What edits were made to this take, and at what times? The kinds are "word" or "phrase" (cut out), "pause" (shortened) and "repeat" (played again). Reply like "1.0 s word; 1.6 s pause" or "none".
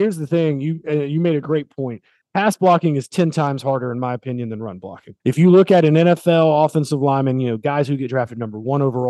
2.2 s pause; 5.2 s pause